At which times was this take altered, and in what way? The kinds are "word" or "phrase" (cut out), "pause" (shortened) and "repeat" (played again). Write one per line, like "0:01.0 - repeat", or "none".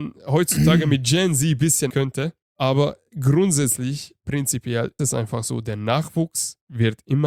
0:01.9 - word
0:02.4 - pause
0:05.0 - word

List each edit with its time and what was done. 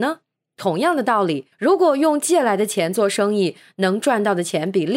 0:01.5 - pause

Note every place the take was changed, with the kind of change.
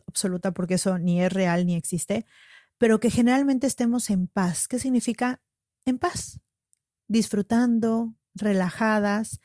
none

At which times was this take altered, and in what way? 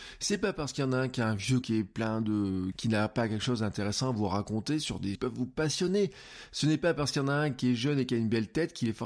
0:01.6 - word
0:02.7 - phrase
0:05.2 - phrase

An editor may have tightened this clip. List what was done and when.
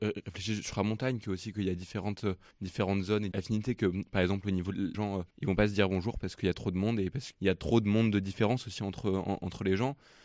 0:02.5 - pause
0:03.3 - word
0:04.9 - phrase
0:05.3 - pause
0:07.3 - word

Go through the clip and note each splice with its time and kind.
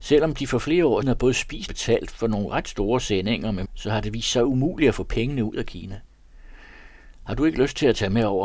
0:01.0 - word
0:01.7 - word
0:03.7 - word

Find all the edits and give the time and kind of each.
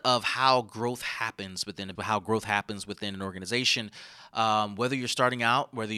0:02.0 - word

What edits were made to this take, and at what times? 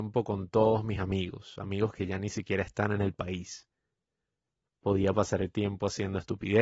none

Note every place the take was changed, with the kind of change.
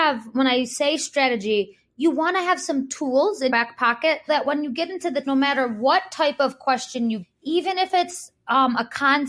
0:03.5 - word
0:04.3 - word
0:05.2 - word
0:07.2 - word

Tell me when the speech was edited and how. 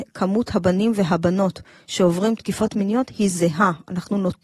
none

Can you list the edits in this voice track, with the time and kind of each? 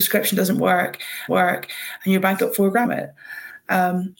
0:01.3 - repeat
0:02.4 - word
0:02.8 - phrase

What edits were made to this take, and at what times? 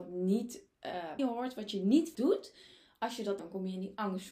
0:01.2 - word
0:02.1 - word
0:03.4 - phrase

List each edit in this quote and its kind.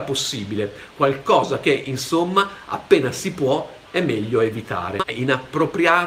0:05.1 - word

